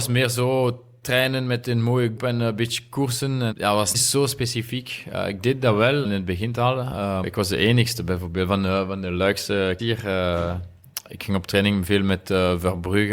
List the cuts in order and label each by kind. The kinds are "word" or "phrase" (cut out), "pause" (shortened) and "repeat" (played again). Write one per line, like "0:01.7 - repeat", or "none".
0:02.2 - word
0:03.5 - word
0:03.9 - word
0:06.0 - word
0:07.2 - word
0:09.8 - word